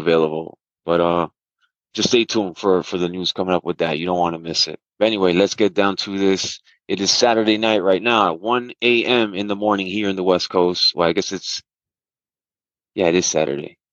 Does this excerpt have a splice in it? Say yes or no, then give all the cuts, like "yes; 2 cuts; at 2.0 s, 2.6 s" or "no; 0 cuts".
yes; 1 cut; at 4.9 s